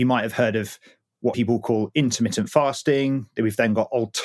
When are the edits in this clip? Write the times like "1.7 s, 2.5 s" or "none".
1.3 s